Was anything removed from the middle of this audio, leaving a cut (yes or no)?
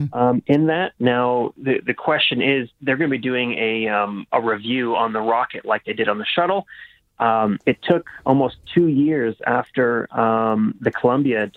yes